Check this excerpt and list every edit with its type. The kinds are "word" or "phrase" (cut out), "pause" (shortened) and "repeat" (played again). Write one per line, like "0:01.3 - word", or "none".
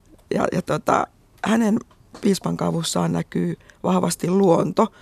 none

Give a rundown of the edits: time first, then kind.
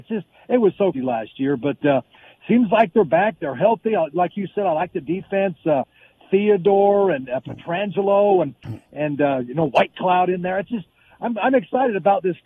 0:00.9 - word

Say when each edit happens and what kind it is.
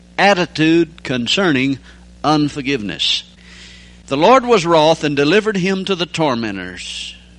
none

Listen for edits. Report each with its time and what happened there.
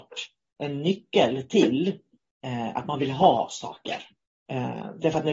0:04.3 - pause

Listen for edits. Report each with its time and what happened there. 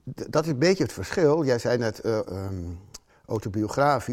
0:02.2 - word

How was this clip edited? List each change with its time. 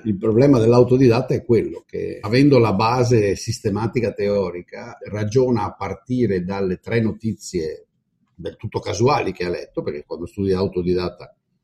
0:02.2 - word
0:05.0 - word

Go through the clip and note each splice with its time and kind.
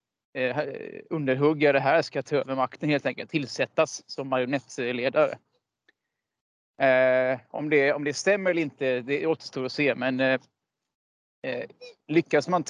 none

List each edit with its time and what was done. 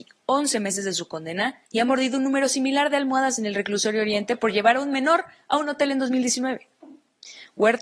0:01.6 - pause

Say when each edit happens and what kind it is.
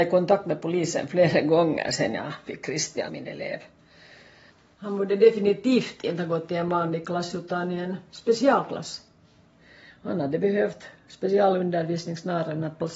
0:03.1 - word

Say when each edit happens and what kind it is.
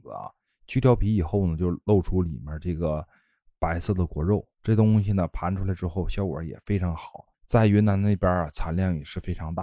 0:07.3 - pause

